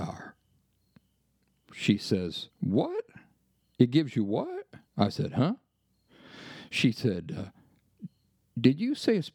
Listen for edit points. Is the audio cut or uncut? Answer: cut